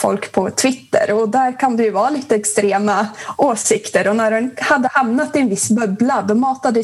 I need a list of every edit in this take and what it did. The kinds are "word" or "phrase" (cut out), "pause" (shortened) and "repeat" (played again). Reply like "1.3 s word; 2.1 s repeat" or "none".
none